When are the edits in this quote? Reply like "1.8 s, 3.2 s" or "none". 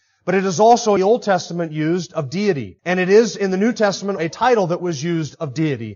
1.0 s, 2.8 s, 4.2 s